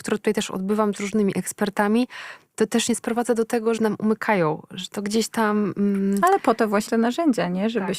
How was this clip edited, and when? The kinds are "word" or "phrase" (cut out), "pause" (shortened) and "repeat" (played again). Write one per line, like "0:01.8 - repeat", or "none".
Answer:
0:02.9 - phrase
0:03.8 - phrase
0:06.9 - word